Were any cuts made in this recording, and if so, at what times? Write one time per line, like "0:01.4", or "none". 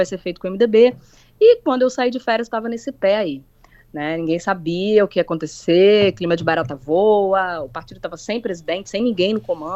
none